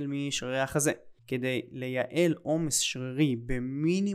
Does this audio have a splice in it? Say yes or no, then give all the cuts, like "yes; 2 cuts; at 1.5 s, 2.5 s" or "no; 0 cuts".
yes; 1 cut; at 1.2 s